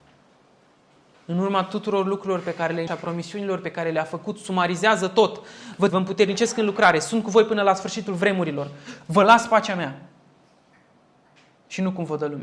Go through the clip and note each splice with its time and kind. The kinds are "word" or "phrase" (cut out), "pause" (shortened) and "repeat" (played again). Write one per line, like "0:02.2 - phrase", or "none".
0:02.9 - word
0:05.9 - phrase